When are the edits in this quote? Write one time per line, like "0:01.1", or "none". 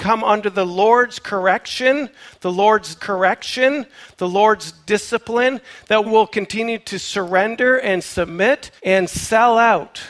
0:03.0
0:06.0
0:08.8